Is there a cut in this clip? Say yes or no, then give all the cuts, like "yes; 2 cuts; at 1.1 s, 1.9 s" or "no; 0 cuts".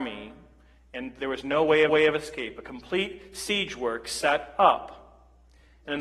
yes; 1 cut; at 1.9 s